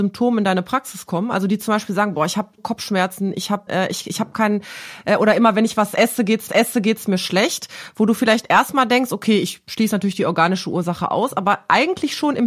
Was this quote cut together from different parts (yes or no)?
yes